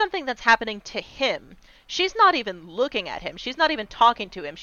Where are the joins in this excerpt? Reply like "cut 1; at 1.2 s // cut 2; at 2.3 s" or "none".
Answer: none